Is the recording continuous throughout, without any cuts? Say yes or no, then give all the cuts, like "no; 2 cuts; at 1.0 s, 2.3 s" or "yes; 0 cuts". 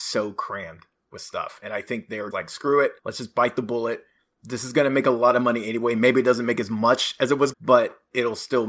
no; 3 cuts; at 2.3 s, 3.0 s, 7.5 s